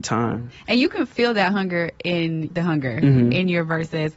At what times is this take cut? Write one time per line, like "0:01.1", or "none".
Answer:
0:02.5